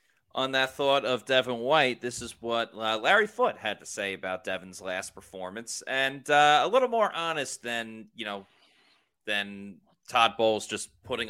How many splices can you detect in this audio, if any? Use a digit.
0